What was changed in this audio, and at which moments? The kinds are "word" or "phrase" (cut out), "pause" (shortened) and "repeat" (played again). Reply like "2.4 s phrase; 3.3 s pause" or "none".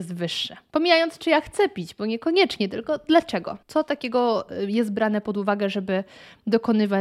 3.6 s pause